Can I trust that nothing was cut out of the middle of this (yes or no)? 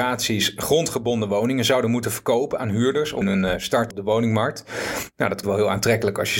no